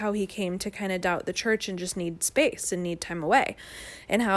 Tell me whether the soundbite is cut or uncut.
uncut